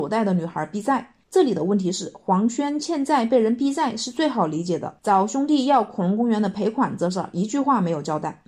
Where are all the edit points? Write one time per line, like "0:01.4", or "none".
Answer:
0:01.2